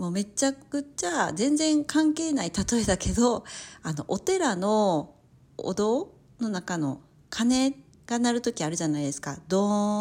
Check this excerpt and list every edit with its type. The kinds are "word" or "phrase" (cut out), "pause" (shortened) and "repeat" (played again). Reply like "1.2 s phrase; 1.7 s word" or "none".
none